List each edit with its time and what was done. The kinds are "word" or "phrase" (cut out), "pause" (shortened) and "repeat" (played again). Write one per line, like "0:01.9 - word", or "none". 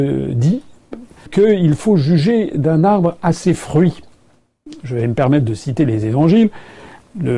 0:01.3 - word